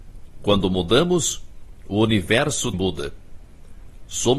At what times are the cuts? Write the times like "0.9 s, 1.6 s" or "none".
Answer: 2.7 s